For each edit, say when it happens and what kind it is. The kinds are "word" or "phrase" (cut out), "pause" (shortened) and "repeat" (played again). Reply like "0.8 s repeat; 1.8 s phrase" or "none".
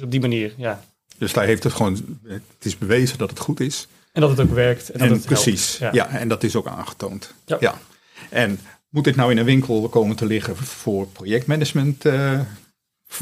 none